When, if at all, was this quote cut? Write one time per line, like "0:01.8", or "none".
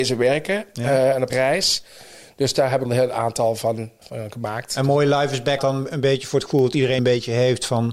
0:01.3
0:02.8
0:04.0
0:05.6
0:07.0